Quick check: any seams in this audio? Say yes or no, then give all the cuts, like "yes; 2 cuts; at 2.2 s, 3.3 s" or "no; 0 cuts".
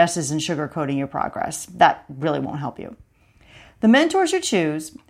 no; 0 cuts